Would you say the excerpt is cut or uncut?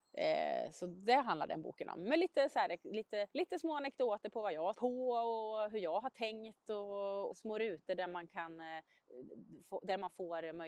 cut